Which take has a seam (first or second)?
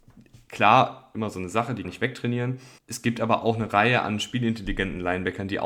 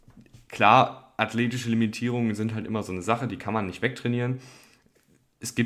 first